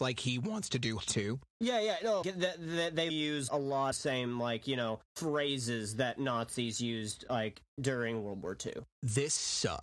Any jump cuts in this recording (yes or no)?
yes